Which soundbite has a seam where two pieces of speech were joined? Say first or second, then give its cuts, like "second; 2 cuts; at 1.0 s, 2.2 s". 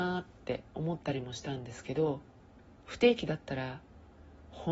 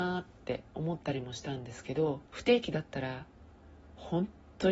second; 1 cut; at 2.3 s